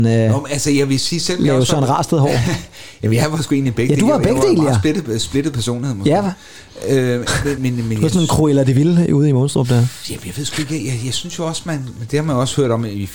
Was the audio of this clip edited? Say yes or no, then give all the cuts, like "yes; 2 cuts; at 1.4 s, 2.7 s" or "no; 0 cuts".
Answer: yes; 1 cut; at 7.6 s